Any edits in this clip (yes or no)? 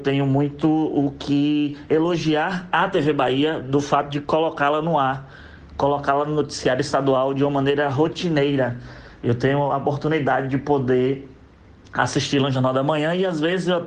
no